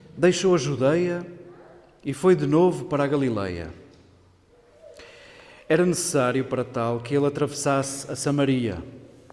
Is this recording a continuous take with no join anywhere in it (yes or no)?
yes